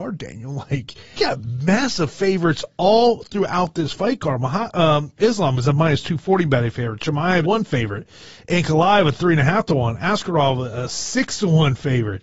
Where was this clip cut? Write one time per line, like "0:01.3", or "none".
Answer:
0:01.2
0:07.4